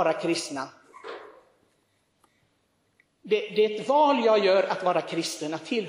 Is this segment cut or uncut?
uncut